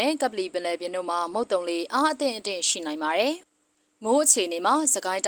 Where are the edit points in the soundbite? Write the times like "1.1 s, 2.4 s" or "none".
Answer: 3.4 s